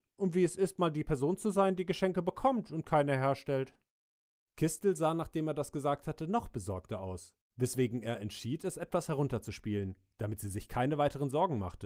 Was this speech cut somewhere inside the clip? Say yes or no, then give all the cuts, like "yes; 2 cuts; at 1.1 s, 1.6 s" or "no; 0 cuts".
no; 0 cuts